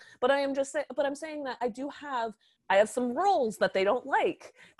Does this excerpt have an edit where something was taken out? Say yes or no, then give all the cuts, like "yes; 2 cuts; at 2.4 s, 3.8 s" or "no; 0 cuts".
yes; 1 cut; at 2.6 s